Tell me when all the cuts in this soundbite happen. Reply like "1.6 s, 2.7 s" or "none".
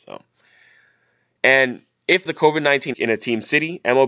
2.3 s, 2.9 s